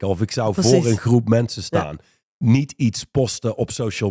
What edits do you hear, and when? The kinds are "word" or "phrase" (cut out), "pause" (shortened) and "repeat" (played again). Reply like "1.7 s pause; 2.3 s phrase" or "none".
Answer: none